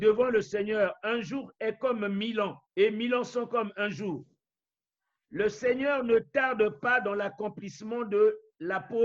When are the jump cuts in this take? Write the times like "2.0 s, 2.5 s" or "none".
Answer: 2.6 s

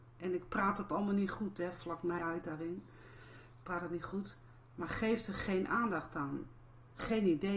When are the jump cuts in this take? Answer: 2.2 s

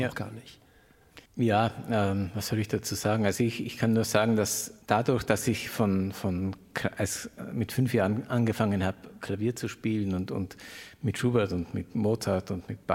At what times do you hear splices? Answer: 1.3 s, 4.8 s

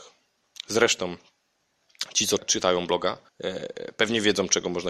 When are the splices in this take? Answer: 2.4 s, 3.3 s

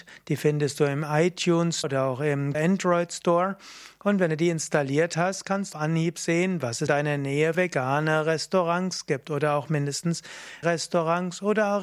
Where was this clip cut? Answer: 1.8 s, 2.5 s, 5.7 s, 6.9 s, 7.5 s, 10.6 s

